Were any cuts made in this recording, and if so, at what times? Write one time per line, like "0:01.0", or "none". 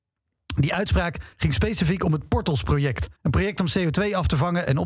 0:01.3
0:03.2

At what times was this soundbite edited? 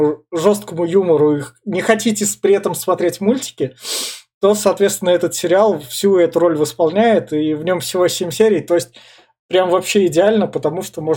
none

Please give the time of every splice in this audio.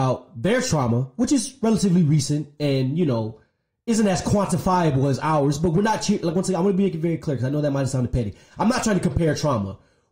none

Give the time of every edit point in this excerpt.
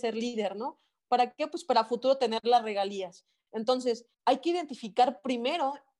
0:04.1

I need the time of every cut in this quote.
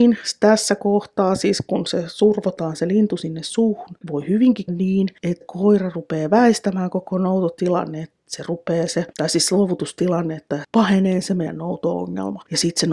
0:04.0
0:04.7
0:05.4
0:08.2
0:09.1
0:10.6

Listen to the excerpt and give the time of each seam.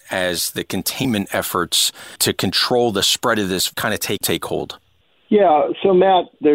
0:03.7
0:04.2

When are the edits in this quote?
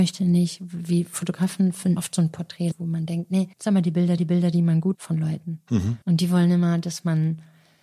0:02.0
0:02.7
0:03.5
0:04.2
0:04.9
0:06.0

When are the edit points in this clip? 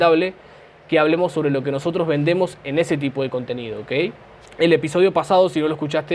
0:04.5

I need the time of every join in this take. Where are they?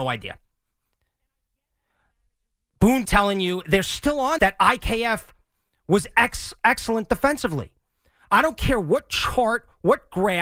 0:03.0
0:04.4

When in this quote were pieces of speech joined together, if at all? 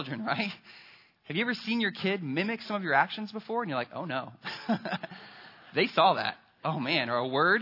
none

